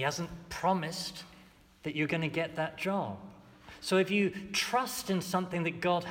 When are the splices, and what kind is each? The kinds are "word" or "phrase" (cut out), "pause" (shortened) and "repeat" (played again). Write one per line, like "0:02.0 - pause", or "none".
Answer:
none